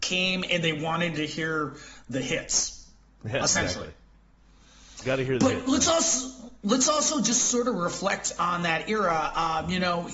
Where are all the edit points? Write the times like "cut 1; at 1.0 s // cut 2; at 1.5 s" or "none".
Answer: none